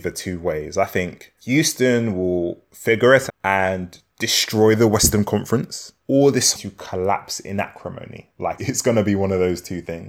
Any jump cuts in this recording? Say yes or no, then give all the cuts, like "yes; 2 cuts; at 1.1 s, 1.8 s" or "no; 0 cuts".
yes; 5 cuts; at 1.4 s, 3.3 s, 6.0 s, 6.5 s, 8.6 s